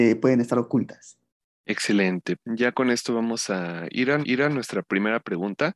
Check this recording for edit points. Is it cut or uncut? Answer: cut